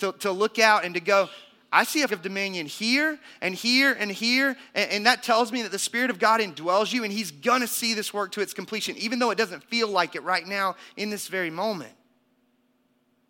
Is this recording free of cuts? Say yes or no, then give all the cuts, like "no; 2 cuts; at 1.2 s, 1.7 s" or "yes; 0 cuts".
no; 1 cut; at 2.1 s